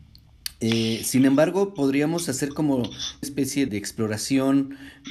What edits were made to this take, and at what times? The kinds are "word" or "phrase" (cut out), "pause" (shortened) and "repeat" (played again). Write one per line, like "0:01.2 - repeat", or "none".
0:03.2 - word
0:03.7 - word